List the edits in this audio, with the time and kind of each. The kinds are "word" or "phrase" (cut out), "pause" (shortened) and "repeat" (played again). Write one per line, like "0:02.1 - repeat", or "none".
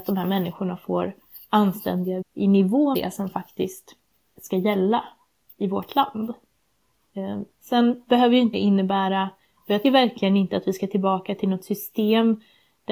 0:02.2 - word
0:02.9 - word
0:04.4 - word
0:07.5 - word
0:08.5 - word
0:09.8 - word